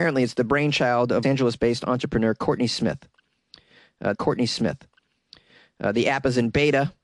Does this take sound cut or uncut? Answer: cut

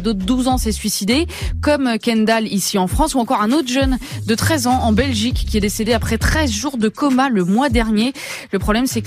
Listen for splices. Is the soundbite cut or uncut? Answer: uncut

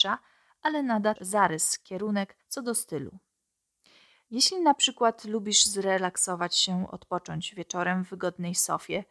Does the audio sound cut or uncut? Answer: cut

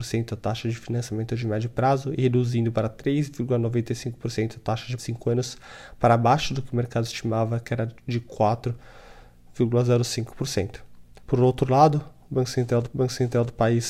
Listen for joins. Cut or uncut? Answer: cut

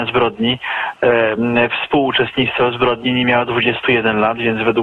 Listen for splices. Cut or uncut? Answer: uncut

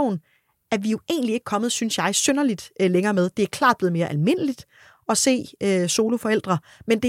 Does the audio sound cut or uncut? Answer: uncut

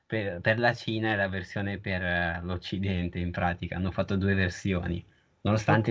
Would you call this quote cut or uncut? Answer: uncut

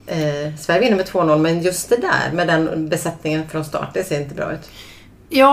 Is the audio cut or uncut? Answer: uncut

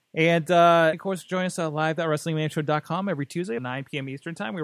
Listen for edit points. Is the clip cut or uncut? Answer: cut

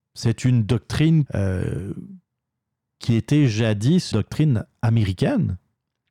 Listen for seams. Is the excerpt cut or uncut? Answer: cut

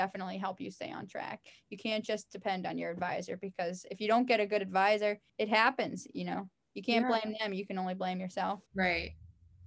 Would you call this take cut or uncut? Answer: cut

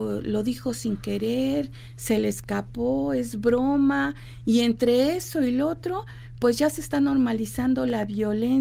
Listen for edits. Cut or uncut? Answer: uncut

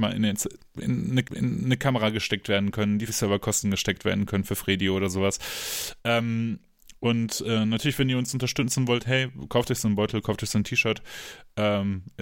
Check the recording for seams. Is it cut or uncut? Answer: cut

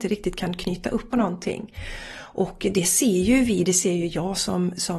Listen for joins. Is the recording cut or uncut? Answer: cut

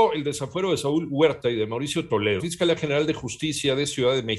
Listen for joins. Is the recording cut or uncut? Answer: cut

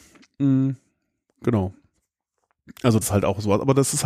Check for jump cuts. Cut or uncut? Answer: cut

